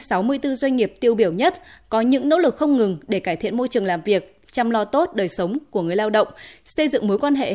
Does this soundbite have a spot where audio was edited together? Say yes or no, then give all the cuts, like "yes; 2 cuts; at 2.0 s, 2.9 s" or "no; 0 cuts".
no; 0 cuts